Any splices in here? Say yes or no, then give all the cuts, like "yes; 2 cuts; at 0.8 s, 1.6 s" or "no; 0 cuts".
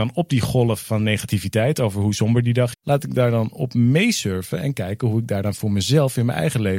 yes; 1 cut; at 2.7 s